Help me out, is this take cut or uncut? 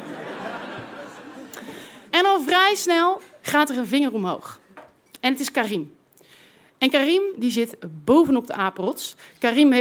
cut